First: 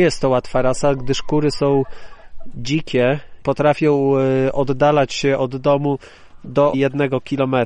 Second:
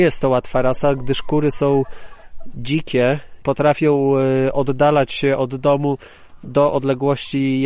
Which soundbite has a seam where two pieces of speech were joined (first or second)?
first